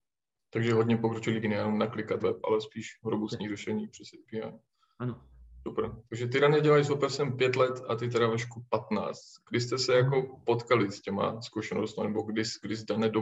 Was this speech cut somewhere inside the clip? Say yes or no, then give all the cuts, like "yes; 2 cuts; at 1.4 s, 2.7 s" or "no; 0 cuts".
yes; 2 cuts; at 1.4 s, 2.2 s